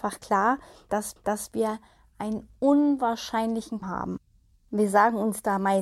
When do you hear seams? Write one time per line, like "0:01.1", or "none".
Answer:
0:01.2
0:03.8